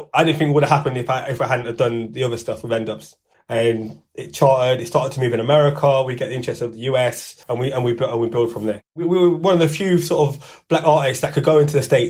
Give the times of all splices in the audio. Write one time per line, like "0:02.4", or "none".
0:07.4